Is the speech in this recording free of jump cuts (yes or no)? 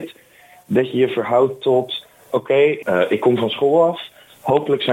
yes